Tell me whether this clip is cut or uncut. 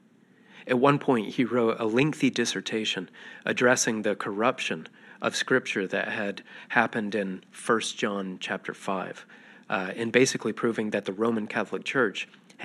uncut